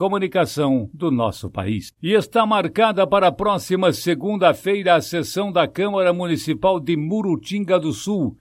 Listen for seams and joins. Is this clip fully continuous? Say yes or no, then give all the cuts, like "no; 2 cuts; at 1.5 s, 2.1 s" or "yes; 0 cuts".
yes; 0 cuts